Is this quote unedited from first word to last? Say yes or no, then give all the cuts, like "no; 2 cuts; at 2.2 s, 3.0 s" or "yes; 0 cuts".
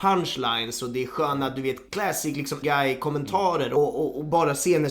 no; 2 cuts; at 1.9 s, 2.6 s